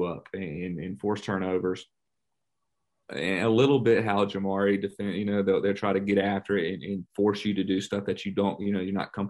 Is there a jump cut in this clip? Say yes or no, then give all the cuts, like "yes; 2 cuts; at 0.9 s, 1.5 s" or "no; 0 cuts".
no; 0 cuts